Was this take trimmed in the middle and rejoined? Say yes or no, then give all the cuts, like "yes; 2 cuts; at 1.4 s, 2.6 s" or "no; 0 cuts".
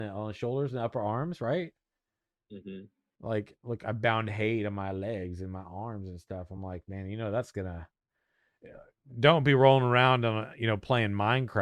no; 0 cuts